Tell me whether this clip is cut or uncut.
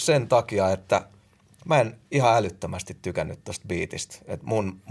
uncut